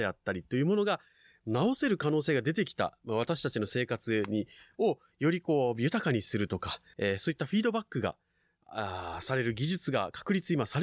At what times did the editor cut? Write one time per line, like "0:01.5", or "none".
0:06.9